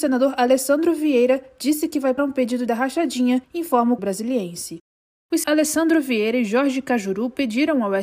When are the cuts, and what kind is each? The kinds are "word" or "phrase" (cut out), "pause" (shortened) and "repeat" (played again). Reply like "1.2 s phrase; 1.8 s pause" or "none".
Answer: 2.2 s word; 2.7 s phrase; 3.4 s pause; 4.0 s word; 5.4 s word